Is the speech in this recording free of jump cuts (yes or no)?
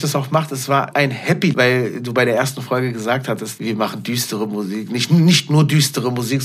no